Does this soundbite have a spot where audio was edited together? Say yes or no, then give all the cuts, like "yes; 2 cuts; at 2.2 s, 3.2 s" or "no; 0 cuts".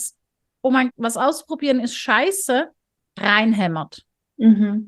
yes; 1 cut; at 0.9 s